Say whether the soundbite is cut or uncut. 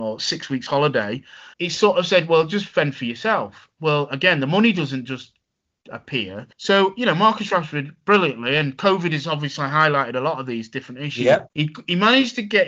cut